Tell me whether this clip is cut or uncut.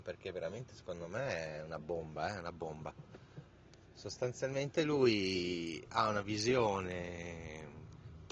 uncut